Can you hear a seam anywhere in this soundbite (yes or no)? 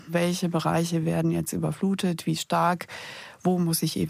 no